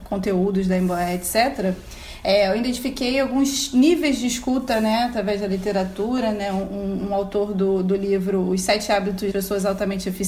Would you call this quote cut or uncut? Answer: cut